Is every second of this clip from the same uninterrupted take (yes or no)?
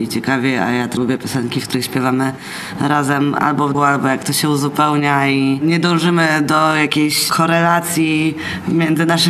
no